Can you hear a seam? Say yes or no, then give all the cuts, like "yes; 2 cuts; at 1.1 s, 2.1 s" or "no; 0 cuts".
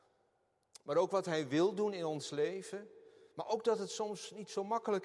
yes; 1 cut; at 3.3 s